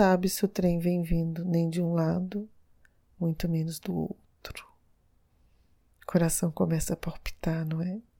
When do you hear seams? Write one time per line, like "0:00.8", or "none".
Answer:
none